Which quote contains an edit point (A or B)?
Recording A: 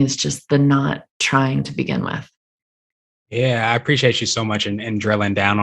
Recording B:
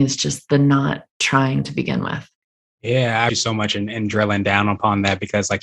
B